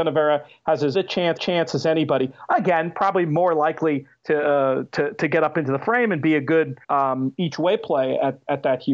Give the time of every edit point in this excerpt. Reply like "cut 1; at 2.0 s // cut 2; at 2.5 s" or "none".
cut 1; at 0.9 s // cut 2; at 1.4 s // cut 3; at 6.8 s

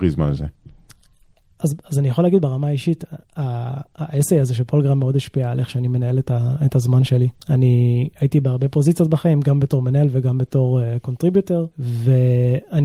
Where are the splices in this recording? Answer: cut 1; at 3.2 s // cut 2; at 7.4 s // cut 3; at 11.7 s

